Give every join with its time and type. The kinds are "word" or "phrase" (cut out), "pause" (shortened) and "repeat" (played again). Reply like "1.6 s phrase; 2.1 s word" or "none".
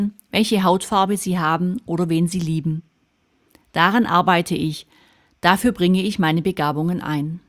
none